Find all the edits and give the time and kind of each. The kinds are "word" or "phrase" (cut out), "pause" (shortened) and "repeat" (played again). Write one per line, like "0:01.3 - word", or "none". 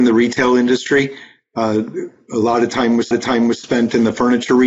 0:03.1 - repeat